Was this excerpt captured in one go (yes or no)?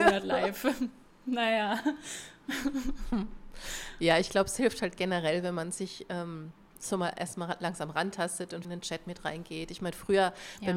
no